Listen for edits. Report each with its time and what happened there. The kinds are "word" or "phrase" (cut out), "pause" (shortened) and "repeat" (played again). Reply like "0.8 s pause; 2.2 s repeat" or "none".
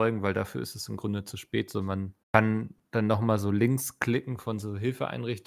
2.2 s pause